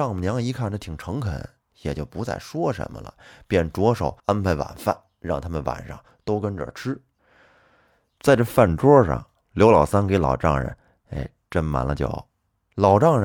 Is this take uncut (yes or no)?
no